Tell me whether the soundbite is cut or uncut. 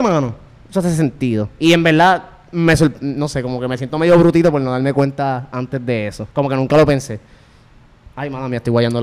cut